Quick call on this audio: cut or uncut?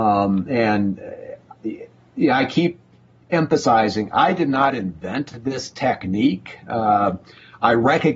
uncut